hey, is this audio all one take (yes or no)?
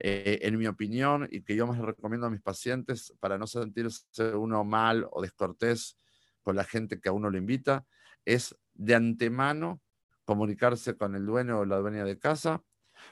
yes